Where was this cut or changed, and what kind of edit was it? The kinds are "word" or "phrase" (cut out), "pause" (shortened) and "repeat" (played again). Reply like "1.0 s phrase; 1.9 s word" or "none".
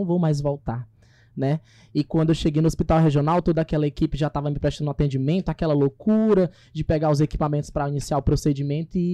none